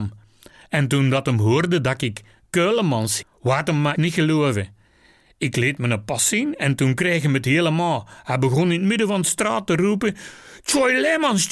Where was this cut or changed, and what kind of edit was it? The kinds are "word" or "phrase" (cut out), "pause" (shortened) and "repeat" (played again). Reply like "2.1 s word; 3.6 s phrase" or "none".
3.2 s word; 3.9 s word

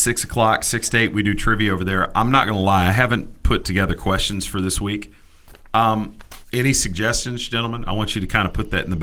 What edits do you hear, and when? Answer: 6.4 s pause

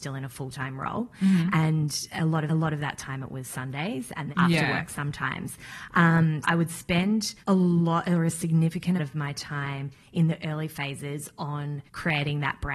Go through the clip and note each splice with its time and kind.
2.5 s repeat; 4.3 s word; 6.4 s word; 7.4 s pause; 9.0 s word; 11.9 s pause

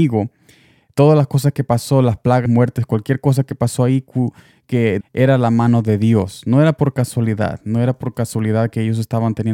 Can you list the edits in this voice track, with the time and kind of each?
2.5 s word; 5.0 s phrase

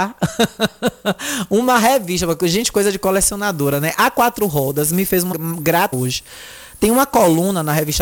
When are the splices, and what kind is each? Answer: 5.3 s word; 5.9 s word

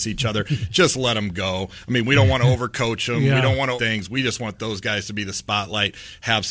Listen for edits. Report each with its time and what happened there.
3.8 s word

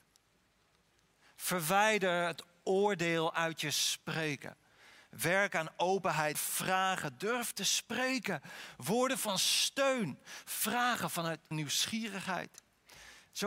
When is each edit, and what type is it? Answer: 6.3 s phrase; 11.5 s word

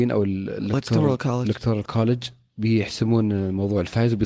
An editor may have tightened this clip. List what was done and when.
none

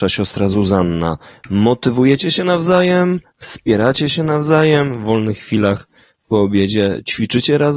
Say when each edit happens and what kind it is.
none

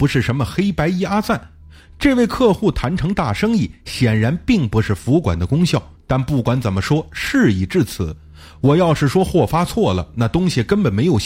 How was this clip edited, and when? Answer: 6.0 s pause

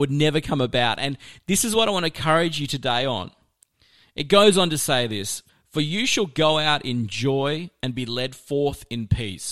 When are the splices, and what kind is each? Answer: none

